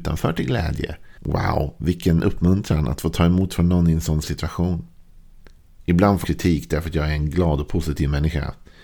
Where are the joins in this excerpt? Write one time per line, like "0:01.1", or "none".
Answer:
0:01.2
0:04.2
0:06.2